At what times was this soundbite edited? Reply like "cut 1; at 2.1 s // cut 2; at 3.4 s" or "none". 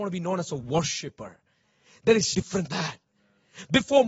cut 1; at 2.3 s // cut 2; at 2.7 s